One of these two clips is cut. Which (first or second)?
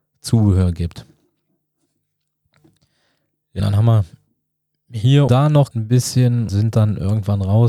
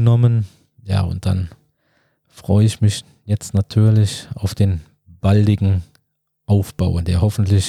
first